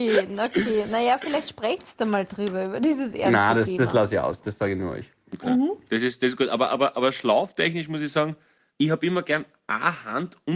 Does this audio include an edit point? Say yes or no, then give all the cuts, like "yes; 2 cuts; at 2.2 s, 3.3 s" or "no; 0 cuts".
no; 0 cuts